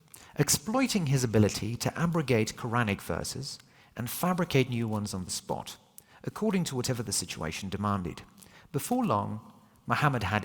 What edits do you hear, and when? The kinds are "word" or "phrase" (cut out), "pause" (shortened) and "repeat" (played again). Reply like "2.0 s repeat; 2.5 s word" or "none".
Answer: none